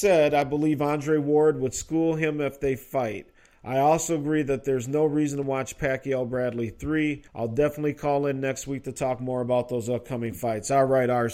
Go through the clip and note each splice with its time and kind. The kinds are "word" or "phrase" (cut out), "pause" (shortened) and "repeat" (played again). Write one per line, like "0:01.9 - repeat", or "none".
0:07.3 - pause

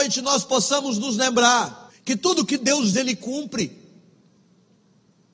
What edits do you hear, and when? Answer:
0:01.9 - pause
0:02.9 - word

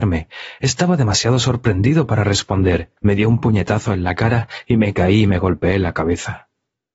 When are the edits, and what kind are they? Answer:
0:03.0 - pause

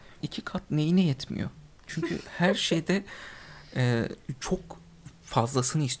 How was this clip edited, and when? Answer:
none

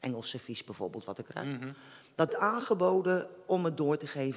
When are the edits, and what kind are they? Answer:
0:01.2 - word
0:02.3 - word

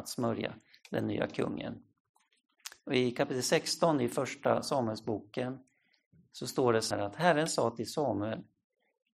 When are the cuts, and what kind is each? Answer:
0:06.9 - word

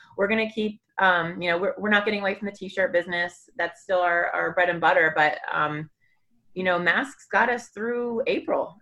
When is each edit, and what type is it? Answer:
none

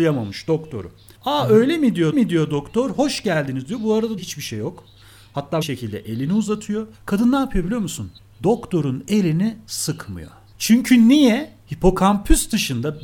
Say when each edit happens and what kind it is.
0:01.1 - pause
0:02.1 - repeat
0:04.2 - phrase
0:05.6 - phrase
0:06.9 - pause
0:08.2 - pause
0:10.5 - pause
0:11.6 - pause

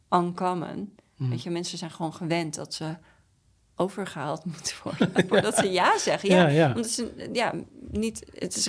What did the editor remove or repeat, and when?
0:03.5 - pause

